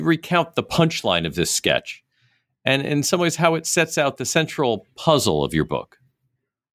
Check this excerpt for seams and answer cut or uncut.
uncut